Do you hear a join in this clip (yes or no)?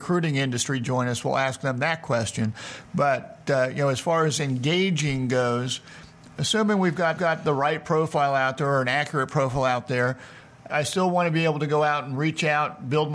yes